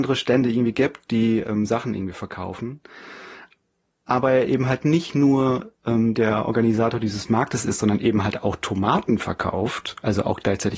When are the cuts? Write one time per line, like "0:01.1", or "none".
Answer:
none